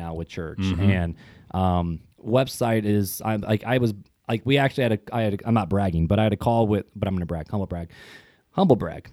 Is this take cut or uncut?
uncut